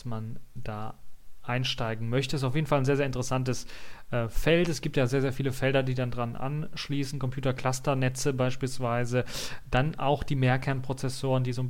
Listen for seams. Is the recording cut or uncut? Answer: uncut